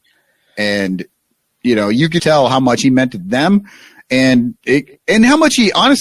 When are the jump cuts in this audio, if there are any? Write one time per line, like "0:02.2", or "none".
0:02.2